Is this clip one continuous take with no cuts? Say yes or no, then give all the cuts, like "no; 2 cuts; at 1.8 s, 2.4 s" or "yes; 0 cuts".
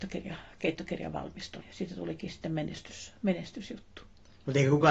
no; 1 cut; at 1.6 s